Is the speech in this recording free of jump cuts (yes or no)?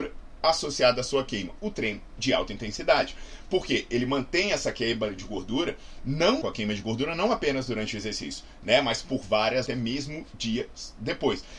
no